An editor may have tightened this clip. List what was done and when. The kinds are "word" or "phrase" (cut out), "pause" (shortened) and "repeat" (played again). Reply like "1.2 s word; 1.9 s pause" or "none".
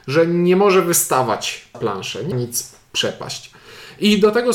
1.7 s word; 2.3 s word